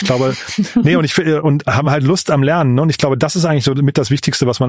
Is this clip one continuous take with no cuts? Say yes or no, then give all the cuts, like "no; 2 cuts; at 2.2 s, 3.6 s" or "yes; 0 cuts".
yes; 0 cuts